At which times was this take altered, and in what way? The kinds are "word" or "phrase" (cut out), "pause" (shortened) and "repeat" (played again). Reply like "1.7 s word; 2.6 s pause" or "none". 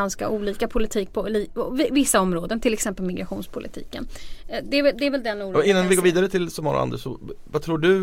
none